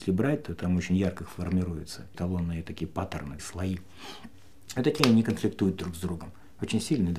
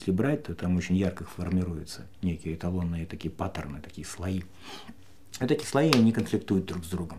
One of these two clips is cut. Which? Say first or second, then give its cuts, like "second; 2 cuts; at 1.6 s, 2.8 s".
first; 3 cuts; at 2.1 s, 3.4 s, 5.0 s